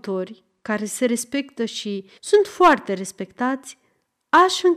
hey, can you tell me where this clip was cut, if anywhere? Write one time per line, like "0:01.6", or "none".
0:02.2